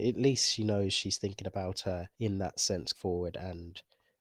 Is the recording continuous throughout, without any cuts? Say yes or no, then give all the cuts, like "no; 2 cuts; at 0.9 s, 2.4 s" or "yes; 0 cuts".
no; 2 cuts; at 2.1 s, 2.9 s